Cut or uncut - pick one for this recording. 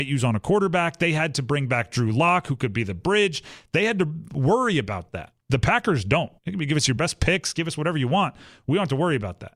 cut